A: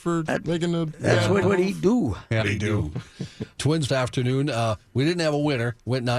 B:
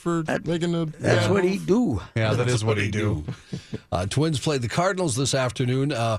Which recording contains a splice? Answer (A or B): A